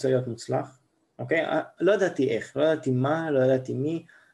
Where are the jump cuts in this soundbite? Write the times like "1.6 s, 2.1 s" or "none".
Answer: none